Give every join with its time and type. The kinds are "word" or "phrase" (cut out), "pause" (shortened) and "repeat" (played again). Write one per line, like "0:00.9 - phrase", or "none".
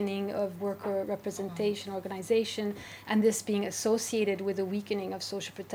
none